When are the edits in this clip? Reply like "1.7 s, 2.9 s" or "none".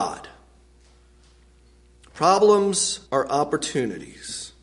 3.1 s